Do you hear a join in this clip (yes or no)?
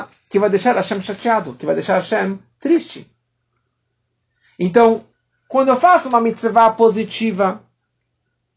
no